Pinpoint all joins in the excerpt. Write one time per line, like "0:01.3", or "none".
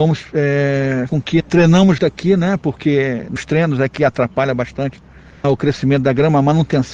0:01.1
0:01.4
0:02.0
0:03.4
0:05.4